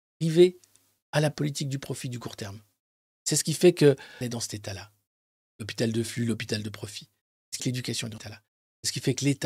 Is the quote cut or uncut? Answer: cut